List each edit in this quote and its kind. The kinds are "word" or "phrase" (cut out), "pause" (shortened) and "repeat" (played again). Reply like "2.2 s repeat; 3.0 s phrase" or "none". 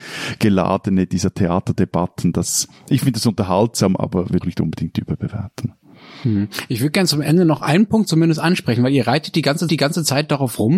4.4 s phrase; 9.7 s repeat